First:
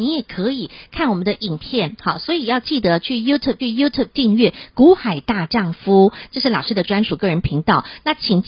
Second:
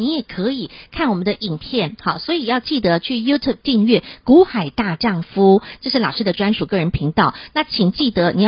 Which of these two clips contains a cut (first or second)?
first